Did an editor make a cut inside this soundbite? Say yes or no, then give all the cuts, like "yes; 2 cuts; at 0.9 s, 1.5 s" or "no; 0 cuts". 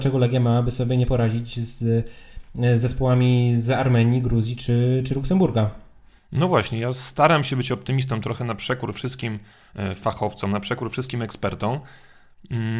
no; 0 cuts